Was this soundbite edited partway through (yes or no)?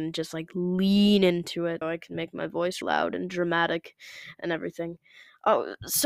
yes